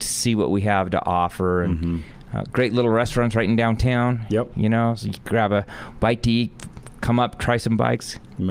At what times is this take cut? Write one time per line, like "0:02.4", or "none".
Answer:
none